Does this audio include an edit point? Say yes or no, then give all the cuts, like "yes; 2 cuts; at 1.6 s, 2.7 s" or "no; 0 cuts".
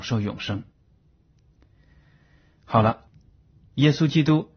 no; 0 cuts